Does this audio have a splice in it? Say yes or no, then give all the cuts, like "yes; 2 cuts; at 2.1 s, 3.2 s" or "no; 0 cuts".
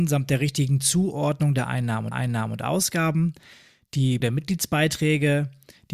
yes; 2 cuts; at 2.1 s, 4.2 s